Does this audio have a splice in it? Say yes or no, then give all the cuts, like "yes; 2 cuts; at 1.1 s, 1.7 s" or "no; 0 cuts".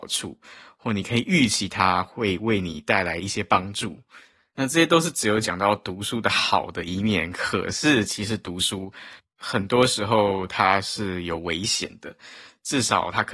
no; 0 cuts